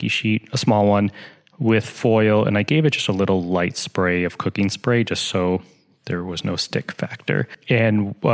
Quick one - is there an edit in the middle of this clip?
no; 0 cuts

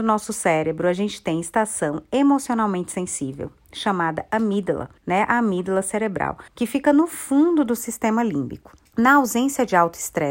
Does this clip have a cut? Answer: yes; 3 cuts; at 5.0 s, 6.5 s, 8.9 s

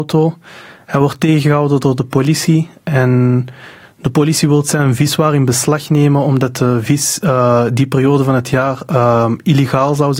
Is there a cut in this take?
no; 0 cuts

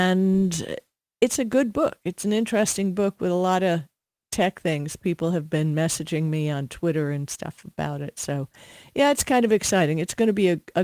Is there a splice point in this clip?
no; 0 cuts

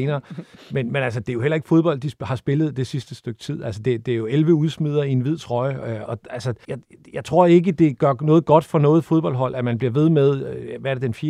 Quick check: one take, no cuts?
no; 2 cuts; at 6.1 s, 6.6 s

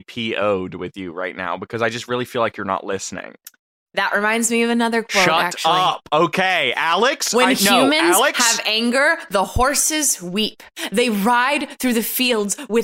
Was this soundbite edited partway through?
no; 0 cuts

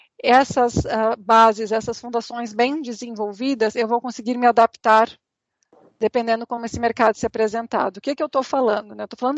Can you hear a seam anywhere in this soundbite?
no; 0 cuts

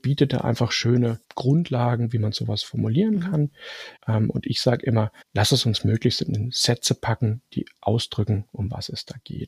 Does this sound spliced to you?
yes; 3 cuts; at 1.2 s, 4.0 s, 5.2 s

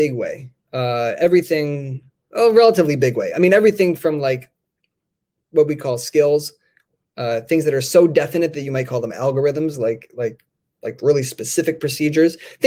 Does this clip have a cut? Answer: no; 0 cuts

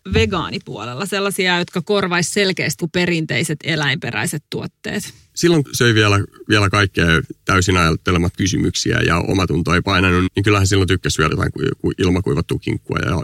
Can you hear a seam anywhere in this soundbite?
yes; 5 cuts; at 2.8 s, 5.6 s, 8.3 s, 10.3 s, 11.3 s

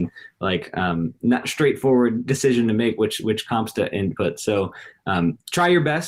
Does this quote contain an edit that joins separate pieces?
yes; 1 cut; at 1.4 s

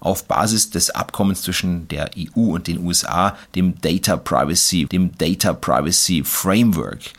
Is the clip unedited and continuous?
no; 1 cut; at 4.9 s

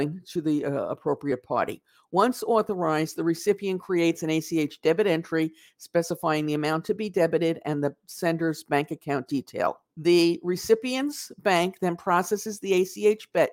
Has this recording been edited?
yes; 1 cut; at 9.9 s

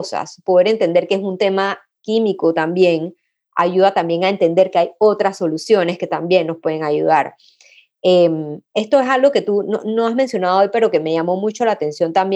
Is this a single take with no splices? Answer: yes; 0 cuts

